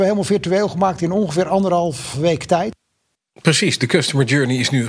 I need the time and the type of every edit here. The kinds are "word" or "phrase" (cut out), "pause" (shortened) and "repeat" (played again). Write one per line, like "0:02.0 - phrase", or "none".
0:02.1 - word